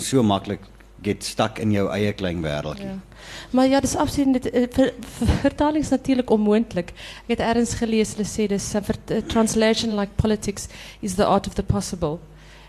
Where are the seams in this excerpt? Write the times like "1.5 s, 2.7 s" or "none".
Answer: none